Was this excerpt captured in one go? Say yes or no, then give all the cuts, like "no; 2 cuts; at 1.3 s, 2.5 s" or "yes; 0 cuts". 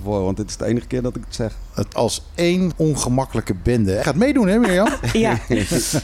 no; 3 cuts; at 1.9 s, 2.7 s, 4.0 s